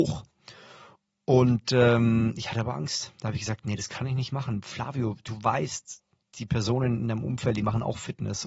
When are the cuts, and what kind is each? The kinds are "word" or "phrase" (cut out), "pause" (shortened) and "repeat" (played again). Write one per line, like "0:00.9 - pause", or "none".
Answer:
0:06.2 - word